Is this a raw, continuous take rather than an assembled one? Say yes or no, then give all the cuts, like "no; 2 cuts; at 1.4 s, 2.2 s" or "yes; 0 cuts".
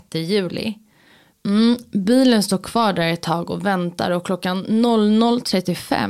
yes; 0 cuts